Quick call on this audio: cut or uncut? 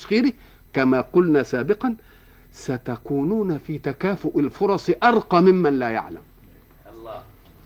uncut